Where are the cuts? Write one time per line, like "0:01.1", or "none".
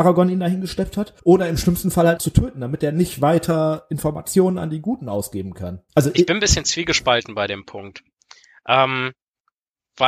0:01.2
0:02.2
0:05.9